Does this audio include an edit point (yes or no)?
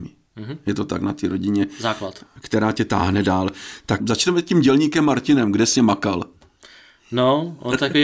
yes